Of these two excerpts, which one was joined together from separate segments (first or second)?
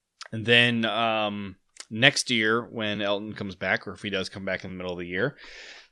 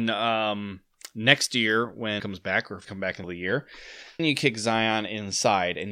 second